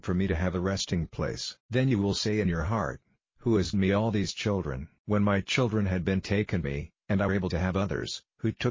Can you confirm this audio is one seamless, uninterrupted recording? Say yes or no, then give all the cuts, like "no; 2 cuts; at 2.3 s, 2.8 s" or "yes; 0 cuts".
no; 4 cuts; at 1.6 s, 3.7 s, 6.6 s, 7.3 s